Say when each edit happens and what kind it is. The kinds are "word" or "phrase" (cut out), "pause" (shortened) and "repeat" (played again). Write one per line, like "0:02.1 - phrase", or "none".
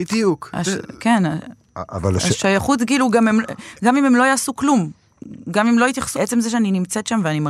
0:06.2 - word